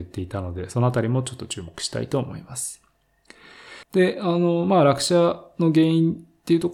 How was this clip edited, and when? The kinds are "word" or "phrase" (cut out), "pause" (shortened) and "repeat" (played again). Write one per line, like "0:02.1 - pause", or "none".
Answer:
0:03.8 - pause